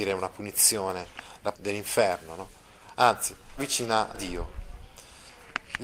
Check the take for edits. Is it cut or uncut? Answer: cut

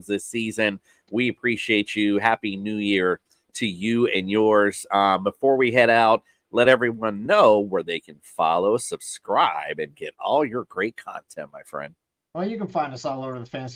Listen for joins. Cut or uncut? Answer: uncut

